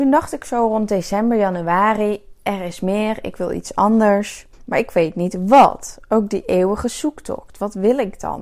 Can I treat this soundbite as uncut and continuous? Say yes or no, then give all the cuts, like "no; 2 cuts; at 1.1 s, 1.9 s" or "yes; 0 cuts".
no; 1 cut; at 4.5 s